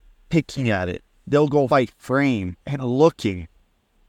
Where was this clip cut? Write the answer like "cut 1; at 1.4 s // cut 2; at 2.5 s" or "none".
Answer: cut 1; at 1.7 s // cut 2; at 2.6 s

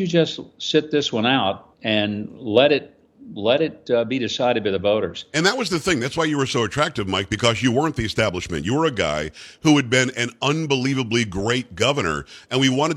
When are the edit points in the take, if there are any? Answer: cut 1; at 1.7 s

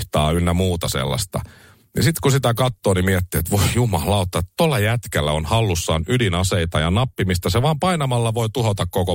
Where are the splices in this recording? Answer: none

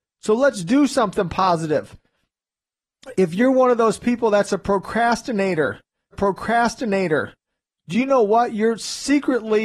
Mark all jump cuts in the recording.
cut 1; at 6.1 s

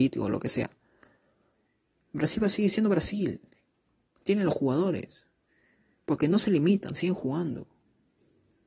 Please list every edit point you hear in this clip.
none

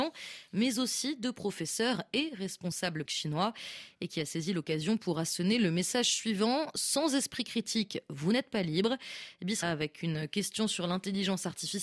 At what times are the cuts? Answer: cut 1; at 3.1 s // cut 2; at 9.6 s

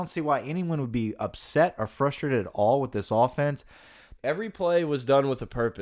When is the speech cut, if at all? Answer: cut 1; at 4.2 s

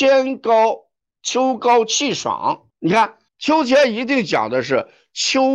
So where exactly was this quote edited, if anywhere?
cut 1; at 2.7 s // cut 2; at 3.3 s

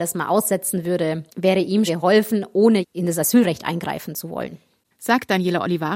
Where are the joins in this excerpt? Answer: cut 1; at 1.3 s // cut 2; at 1.9 s // cut 3; at 2.8 s

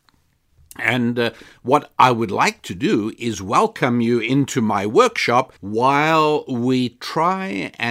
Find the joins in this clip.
cut 1; at 5.6 s

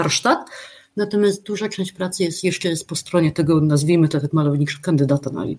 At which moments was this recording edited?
none

